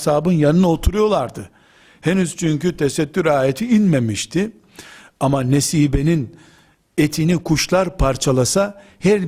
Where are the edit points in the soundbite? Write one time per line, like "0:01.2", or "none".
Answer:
none

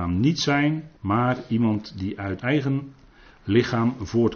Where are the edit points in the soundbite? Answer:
0:01.0
0:02.4

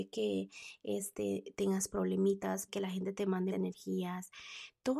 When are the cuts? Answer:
0:02.7
0:03.5

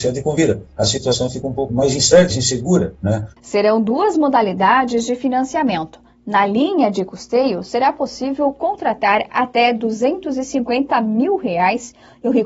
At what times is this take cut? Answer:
0:01.7
0:02.3
0:03.3

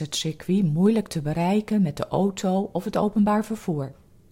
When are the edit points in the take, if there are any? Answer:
none

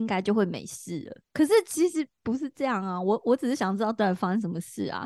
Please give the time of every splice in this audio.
0:01.2

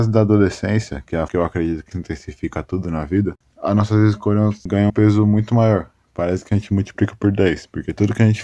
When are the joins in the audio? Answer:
0:01.3
0:01.9
0:04.9

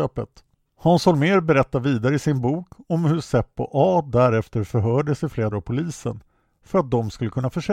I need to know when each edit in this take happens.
0:05.5

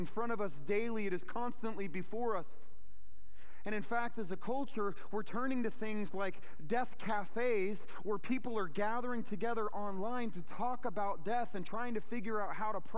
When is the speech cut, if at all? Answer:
none

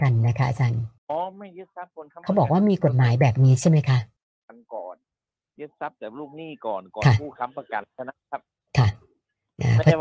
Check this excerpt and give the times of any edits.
0:01.0
0:04.2

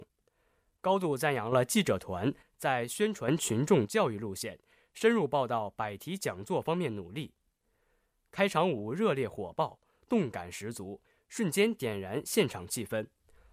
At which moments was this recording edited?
none

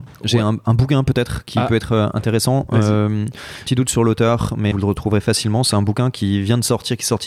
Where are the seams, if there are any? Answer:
0:03.7
0:04.7

